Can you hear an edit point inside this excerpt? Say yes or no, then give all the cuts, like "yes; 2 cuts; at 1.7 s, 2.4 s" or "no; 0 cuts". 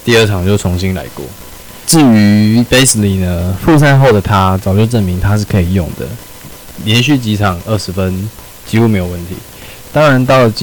no; 0 cuts